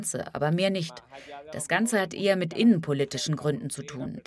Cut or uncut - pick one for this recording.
uncut